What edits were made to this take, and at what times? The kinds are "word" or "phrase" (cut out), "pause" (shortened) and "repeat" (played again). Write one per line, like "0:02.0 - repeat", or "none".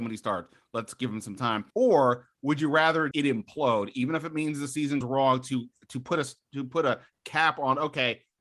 0:01.7 - pause
0:03.1 - word
0:05.0 - word

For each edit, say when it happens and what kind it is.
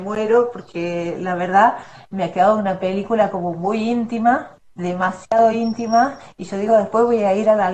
none

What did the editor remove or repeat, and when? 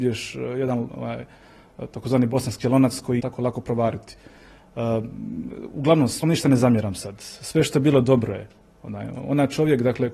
0:03.2 - phrase
0:06.2 - word

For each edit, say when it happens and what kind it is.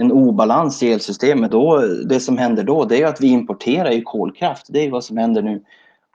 0:01.5 - word

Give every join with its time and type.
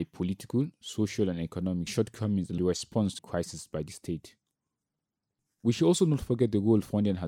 0:01.9 - phrase
0:02.6 - phrase
0:03.2 - word

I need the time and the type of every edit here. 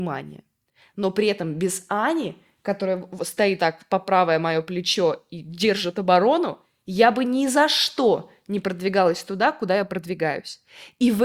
0:03.6 - word

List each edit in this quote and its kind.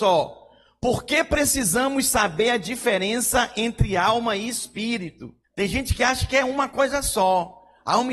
0:05.4 - pause

